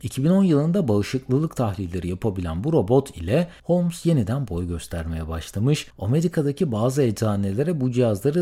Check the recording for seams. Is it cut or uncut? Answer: cut